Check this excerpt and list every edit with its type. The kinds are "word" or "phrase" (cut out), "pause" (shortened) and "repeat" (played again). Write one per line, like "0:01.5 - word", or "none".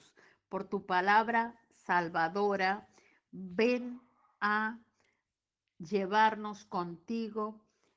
none